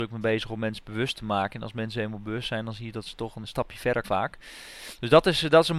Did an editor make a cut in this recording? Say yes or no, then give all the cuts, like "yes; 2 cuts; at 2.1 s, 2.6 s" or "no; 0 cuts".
yes; 2 cuts; at 3.4 s, 4.0 s